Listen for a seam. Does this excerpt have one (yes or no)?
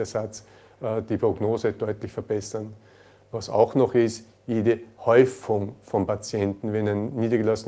no